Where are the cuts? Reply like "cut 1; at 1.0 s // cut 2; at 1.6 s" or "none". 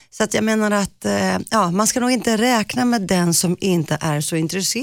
none